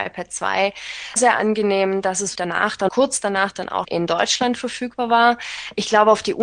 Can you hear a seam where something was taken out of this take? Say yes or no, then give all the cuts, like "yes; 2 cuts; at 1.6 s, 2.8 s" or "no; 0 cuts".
yes; 4 cuts; at 1.2 s, 2.3 s, 2.9 s, 3.8 s